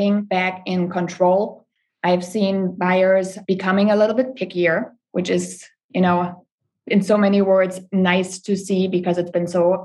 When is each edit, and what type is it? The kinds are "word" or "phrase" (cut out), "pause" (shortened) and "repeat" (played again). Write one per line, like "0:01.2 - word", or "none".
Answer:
none